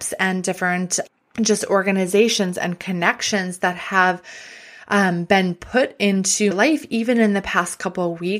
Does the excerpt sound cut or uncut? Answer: cut